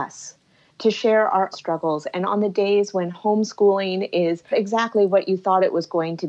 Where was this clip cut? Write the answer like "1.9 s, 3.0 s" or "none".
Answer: 1.5 s, 4.5 s